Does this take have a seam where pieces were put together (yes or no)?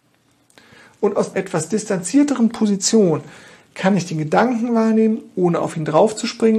yes